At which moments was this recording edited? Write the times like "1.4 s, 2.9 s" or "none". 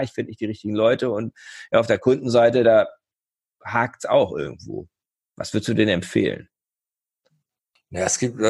none